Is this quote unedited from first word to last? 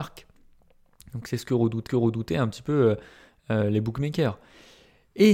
no; 1 cut; at 1.9 s

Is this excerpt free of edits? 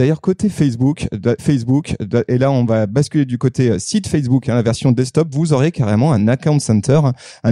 no; 1 cut; at 1.4 s

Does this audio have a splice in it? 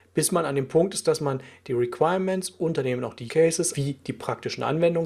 yes; 2 cuts; at 3.3 s, 3.7 s

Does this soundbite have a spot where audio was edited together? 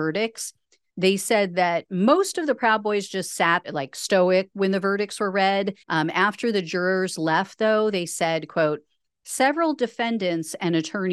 yes; 3 cuts; at 3.6 s, 4.5 s, 5.8 s

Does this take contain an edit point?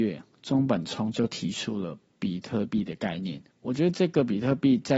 yes; 1 cut; at 3.5 s

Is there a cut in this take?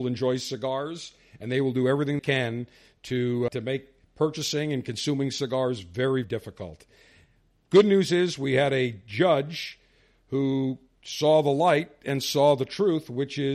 yes; 3 cuts; at 2.2 s, 3.5 s, 6.2 s

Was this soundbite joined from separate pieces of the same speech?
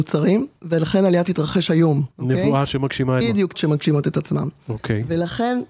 yes; 4 cuts; at 1.3 s, 2.1 s, 3.2 s, 3.5 s

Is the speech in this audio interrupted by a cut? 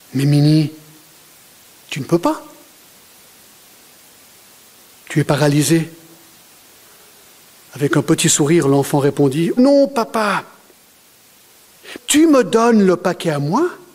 yes; 2 cuts; at 9.6 s, 12.0 s

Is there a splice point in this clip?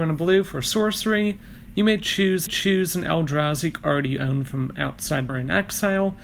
yes; 2 cuts; at 2.5 s, 5.3 s

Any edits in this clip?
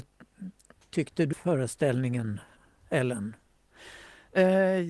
yes; 1 cut; at 1.3 s

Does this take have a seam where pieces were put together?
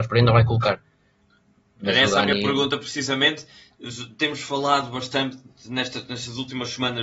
no; 0 cuts

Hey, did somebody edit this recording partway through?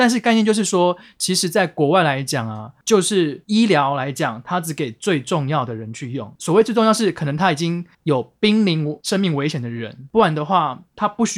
yes; 1 cut; at 7.9 s

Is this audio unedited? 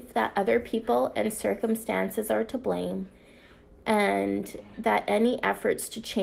yes; 0 cuts

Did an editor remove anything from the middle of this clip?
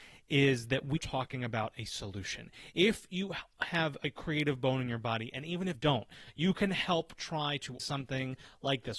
yes; 3 cuts; at 1.0 s, 5.7 s, 7.8 s

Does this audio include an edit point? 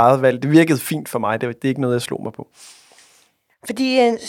no; 0 cuts

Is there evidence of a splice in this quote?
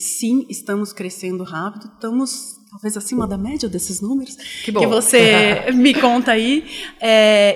no; 0 cuts

